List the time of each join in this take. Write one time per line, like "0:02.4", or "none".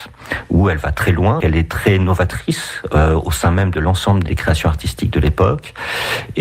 0:01.4
0:04.3